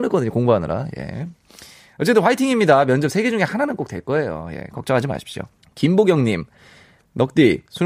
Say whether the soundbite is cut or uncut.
cut